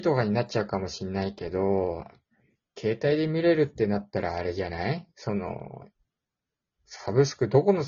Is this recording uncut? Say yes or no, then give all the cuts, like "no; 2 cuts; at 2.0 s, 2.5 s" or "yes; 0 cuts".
yes; 0 cuts